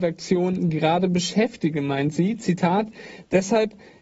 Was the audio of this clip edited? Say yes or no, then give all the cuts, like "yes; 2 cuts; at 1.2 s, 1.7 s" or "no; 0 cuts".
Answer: no; 0 cuts